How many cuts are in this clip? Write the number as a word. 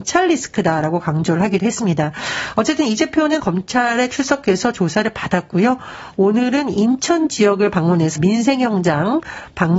two